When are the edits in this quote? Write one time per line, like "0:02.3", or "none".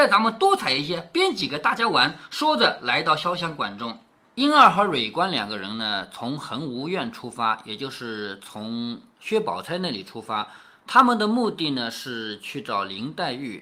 none